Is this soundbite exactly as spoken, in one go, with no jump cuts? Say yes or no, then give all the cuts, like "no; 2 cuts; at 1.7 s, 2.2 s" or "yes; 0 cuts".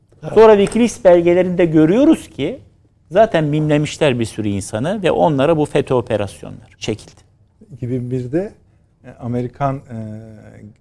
no; 1 cut; at 6.7 s